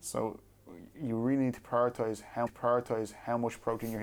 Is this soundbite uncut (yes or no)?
no